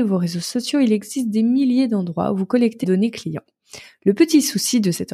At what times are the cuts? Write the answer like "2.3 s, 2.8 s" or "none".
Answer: 2.8 s